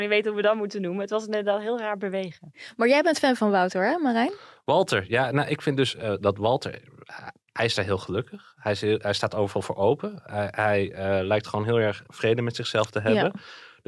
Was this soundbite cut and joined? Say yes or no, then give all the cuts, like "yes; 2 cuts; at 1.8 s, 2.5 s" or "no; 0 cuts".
no; 0 cuts